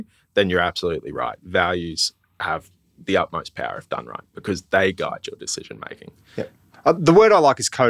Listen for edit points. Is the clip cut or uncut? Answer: uncut